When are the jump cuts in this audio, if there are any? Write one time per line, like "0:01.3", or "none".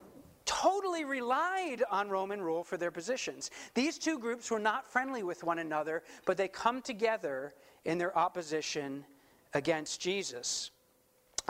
none